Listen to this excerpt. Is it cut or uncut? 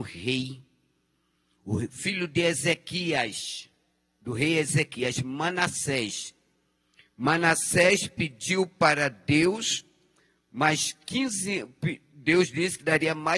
uncut